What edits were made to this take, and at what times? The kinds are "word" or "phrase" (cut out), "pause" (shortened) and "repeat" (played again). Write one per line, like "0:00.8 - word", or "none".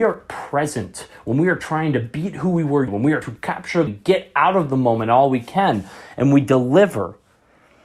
0:02.9 - word
0:03.2 - word
0:03.9 - word